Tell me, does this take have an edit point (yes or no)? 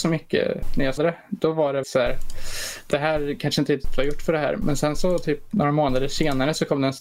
yes